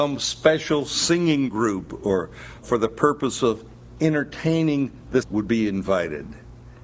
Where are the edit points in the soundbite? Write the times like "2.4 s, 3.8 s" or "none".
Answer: 2.6 s, 5.2 s